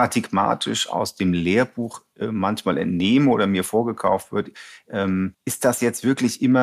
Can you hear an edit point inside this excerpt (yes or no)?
yes